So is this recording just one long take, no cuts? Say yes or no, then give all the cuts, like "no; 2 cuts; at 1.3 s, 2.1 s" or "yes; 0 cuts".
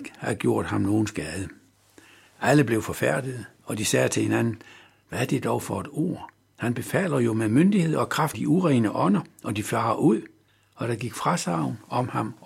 no; 2 cuts; at 8.3 s, 10.5 s